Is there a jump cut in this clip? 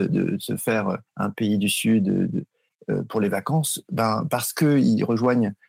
yes; 1 cut; at 1.1 s

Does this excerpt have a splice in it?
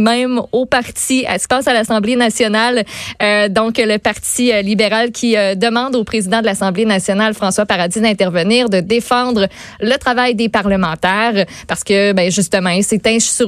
yes; 1 cut; at 1.5 s

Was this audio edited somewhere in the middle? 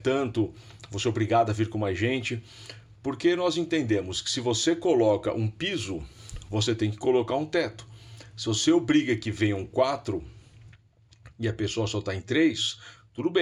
no; 0 cuts

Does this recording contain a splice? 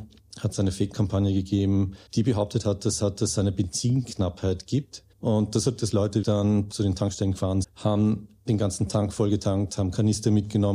yes; 8 cuts; at 0.9 s, 2.1 s, 3.0 s, 5.1 s, 5.8 s, 6.2 s, 6.7 s, 7.6 s

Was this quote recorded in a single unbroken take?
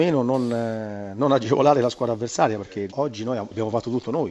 no; 1 cut; at 2.9 s

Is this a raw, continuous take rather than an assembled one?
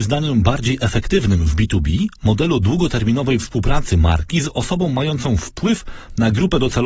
yes; 0 cuts

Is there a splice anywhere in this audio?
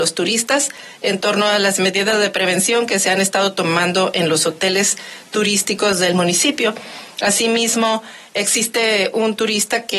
no; 0 cuts

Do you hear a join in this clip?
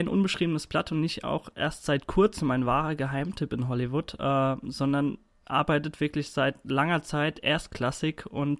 no; 0 cuts

